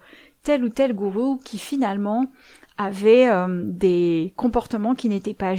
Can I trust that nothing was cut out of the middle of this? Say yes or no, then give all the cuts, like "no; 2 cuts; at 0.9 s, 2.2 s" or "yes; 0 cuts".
yes; 0 cuts